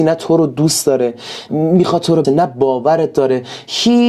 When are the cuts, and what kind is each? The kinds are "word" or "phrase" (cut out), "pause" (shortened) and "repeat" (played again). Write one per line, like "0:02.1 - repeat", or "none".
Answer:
0:01.5 - word
0:02.2 - word

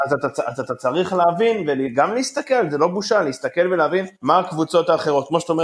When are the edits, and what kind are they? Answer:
0:04.2 - pause

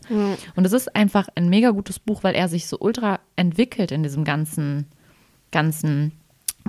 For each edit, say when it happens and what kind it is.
none

